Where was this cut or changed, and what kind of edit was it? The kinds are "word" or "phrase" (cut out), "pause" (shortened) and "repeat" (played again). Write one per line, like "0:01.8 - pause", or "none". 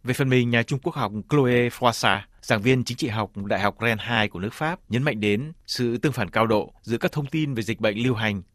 0:04.8 - pause
0:06.8 - pause